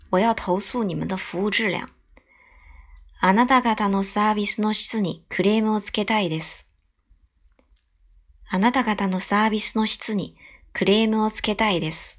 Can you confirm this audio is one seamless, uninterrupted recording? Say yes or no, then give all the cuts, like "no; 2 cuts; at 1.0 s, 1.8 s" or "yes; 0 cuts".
yes; 0 cuts